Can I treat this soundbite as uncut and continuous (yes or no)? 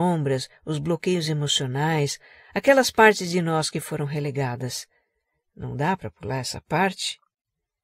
yes